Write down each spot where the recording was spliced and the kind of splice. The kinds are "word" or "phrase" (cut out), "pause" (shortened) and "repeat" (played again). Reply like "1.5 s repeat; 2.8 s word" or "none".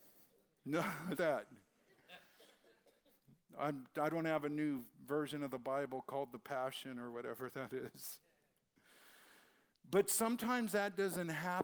1.2 s word; 4.9 s pause